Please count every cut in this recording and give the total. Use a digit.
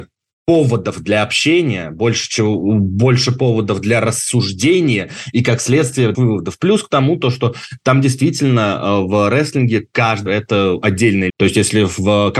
3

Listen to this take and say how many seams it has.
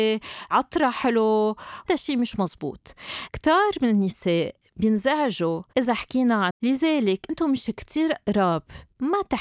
3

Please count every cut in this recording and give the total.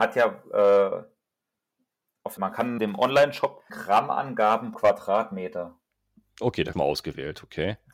5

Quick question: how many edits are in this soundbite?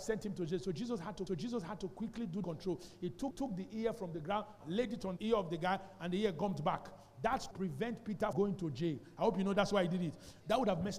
7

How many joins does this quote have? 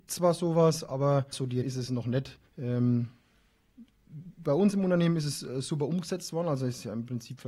3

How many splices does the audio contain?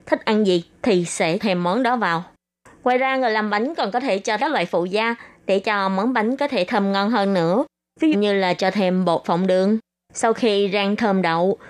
4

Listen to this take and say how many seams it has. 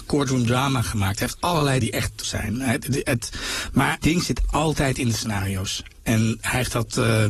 3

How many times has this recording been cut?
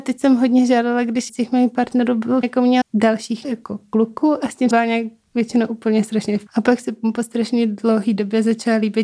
6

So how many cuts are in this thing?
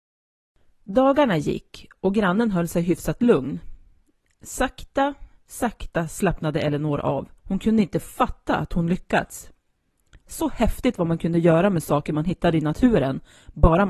1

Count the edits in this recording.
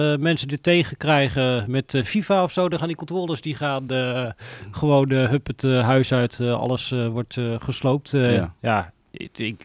0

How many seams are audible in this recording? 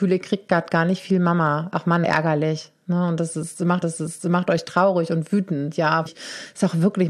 3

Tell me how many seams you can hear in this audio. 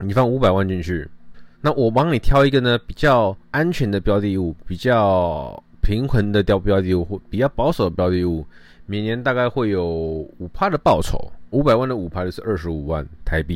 4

